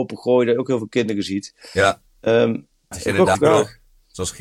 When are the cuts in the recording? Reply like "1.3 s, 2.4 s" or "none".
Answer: 2.9 s, 3.3 s